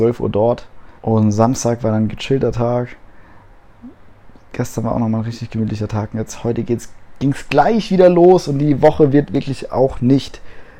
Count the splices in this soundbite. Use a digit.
1